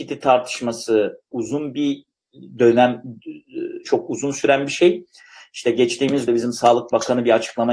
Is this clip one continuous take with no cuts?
no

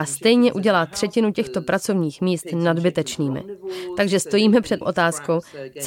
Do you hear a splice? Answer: yes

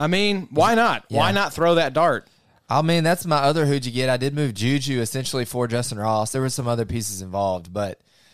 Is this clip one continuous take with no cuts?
yes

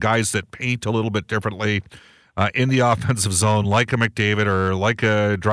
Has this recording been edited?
no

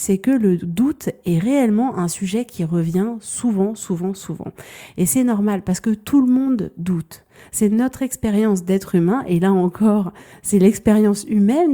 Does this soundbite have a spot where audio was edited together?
no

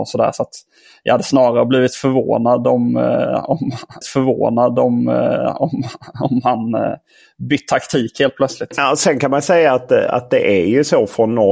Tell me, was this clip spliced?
yes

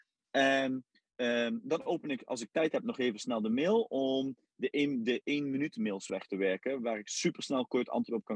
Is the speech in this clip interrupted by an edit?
no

